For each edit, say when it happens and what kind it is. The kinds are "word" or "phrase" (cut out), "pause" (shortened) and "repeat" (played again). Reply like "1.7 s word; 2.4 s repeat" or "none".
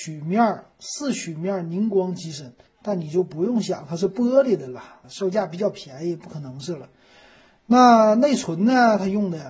2.7 s pause; 5.0 s pause